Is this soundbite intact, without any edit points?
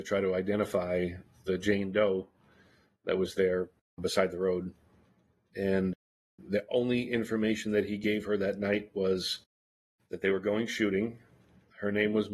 yes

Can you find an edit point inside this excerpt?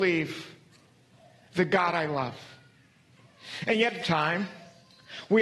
yes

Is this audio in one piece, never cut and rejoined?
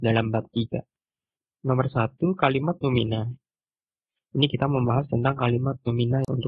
yes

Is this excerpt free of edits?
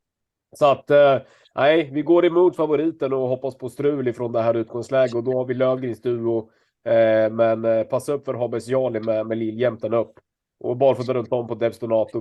yes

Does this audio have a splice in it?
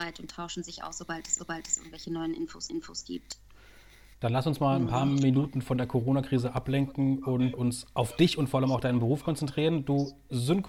yes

